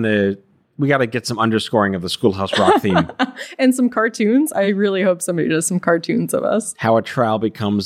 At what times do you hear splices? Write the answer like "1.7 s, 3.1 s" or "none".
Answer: none